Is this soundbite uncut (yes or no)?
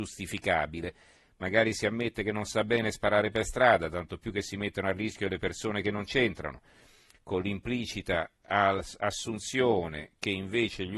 yes